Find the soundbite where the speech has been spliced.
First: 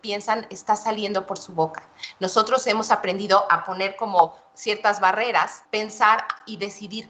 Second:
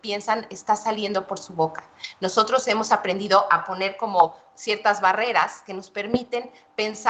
first; 1 cut; at 5.6 s

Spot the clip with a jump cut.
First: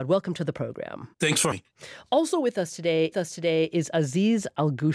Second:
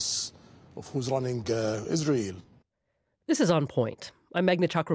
first; 3 cuts; at 1.1 s, 1.5 s, 3.1 s

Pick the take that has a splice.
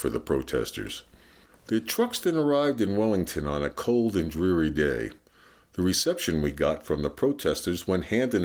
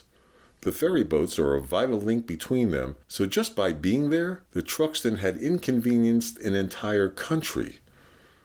second; 2 cuts; at 3.0 s, 4.5 s

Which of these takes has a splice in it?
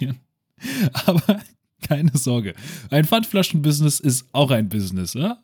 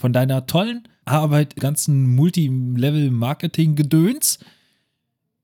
second; 2 cuts; at 1.0 s, 1.6 s

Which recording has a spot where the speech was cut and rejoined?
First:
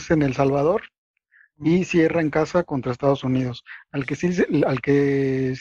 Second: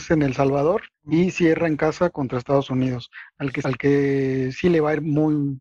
second; 2 cuts; at 0.9 s, 3.6 s

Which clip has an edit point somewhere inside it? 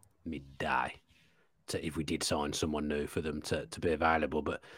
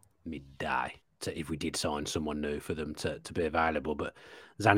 second; 1 cut; at 1.0 s

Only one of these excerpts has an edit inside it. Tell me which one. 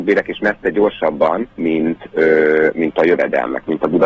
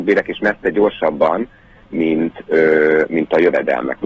first; 1 cut; at 1.5 s

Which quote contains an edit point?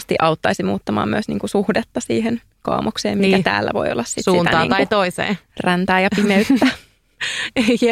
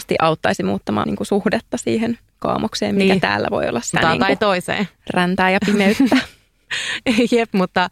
second; 2 cuts; at 1.0 s, 3.9 s

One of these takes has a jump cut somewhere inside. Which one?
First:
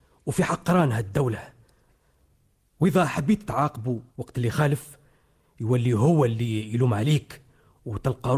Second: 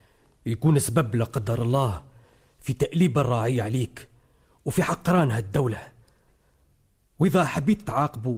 first; 1 cut; at 4.1 s

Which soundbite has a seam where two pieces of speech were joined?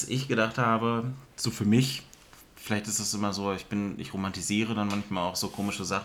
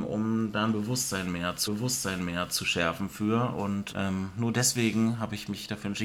second; 2 cuts; at 1.7 s, 3.9 s

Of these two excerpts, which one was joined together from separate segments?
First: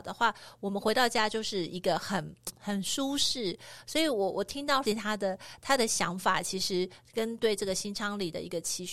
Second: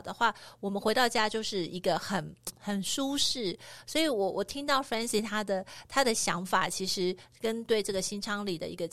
first; 1 cut; at 4.9 s

